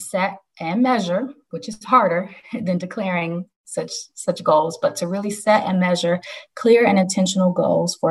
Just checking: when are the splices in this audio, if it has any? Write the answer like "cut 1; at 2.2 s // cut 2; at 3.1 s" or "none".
none